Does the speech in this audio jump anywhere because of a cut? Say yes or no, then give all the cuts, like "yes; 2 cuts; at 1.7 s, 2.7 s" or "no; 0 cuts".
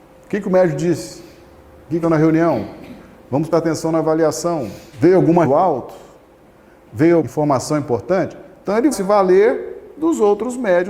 yes; 5 cuts; at 2.0 s, 3.5 s, 5.4 s, 7.2 s, 8.9 s